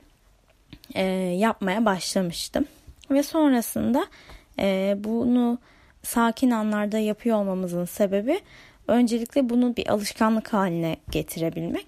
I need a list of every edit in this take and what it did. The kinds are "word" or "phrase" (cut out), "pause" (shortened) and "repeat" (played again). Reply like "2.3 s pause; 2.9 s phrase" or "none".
none